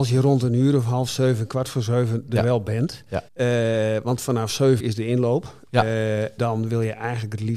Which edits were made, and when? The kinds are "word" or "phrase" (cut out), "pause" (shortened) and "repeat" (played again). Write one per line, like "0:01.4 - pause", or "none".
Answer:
0:03.3 - pause
0:04.8 - word
0:06.4 - word